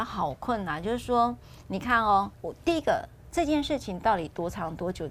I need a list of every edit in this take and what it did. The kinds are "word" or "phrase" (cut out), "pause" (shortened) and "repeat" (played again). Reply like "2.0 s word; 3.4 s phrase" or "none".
2.3 s word